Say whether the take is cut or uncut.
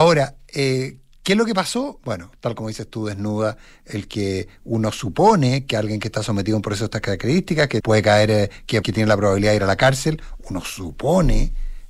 cut